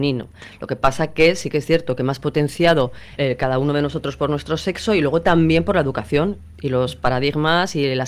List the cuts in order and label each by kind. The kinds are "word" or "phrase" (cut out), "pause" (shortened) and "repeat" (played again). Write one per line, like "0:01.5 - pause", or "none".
0:03.2 - word